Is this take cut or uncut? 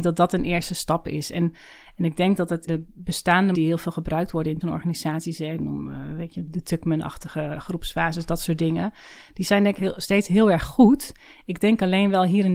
cut